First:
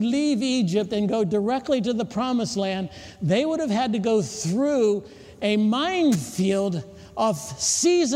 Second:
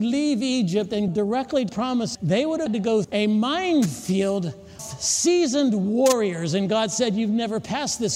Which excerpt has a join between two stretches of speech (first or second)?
second